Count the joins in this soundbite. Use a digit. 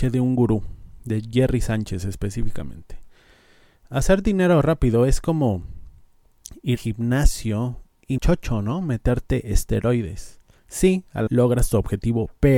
3